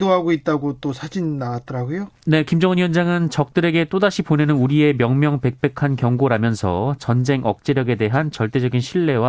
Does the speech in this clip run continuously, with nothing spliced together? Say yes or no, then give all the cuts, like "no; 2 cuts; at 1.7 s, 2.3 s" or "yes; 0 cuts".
yes; 0 cuts